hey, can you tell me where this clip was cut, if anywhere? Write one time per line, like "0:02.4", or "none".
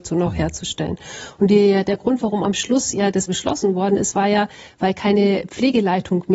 0:03.3